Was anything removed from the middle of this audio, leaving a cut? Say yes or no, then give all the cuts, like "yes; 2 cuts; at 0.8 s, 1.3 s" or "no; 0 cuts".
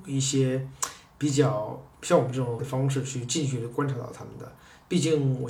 yes; 1 cut; at 2.6 s